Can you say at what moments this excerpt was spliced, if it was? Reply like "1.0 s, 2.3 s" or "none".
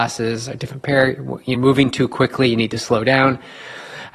1.5 s